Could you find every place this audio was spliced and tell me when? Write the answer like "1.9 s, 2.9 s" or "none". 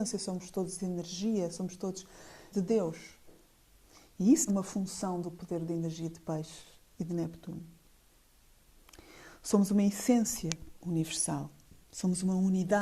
2.5 s, 4.5 s